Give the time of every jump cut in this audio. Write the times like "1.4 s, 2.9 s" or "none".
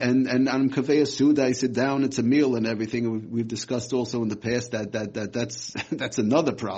4.9 s